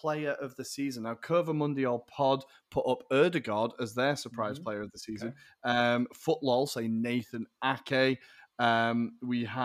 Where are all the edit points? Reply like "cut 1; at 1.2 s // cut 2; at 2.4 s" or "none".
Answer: none